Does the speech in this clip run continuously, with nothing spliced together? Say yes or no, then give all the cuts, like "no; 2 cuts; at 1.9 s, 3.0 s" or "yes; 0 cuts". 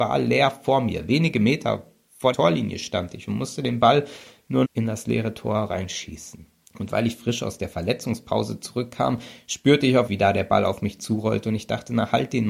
no; 4 cuts; at 2.3 s, 4.6 s, 6.6 s, 10.1 s